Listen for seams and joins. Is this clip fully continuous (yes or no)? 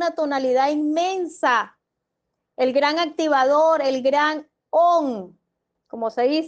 yes